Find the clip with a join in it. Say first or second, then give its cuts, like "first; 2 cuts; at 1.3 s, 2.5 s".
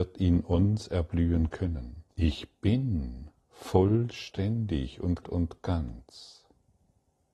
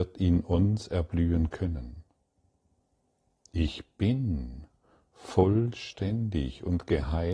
first; 3 cuts; at 2.1 s, 3.4 s, 5.2 s